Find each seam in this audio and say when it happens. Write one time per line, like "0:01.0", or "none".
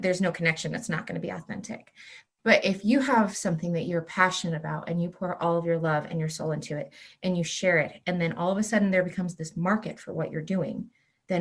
none